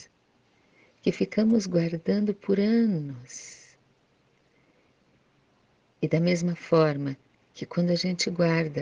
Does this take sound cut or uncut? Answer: uncut